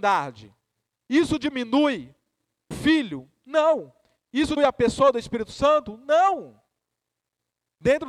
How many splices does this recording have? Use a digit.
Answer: 2